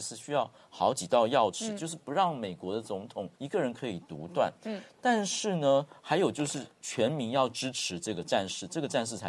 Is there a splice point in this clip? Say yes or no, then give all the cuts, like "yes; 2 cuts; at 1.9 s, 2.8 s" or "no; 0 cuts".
yes; 1 cut; at 3.3 s